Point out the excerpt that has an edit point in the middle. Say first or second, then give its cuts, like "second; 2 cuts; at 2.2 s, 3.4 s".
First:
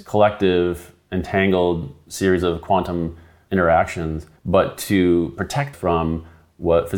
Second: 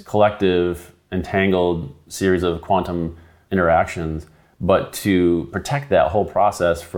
first; 2 cuts; at 4.4 s, 5.7 s